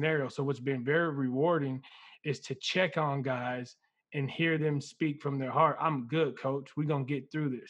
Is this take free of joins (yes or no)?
yes